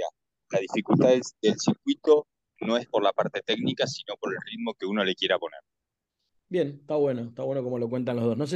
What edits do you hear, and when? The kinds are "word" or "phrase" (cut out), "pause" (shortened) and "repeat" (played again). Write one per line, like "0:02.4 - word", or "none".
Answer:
none